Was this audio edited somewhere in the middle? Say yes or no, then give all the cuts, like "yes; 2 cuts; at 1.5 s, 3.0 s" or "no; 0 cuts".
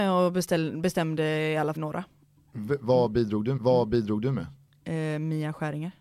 yes; 2 cuts; at 1.8 s, 3.6 s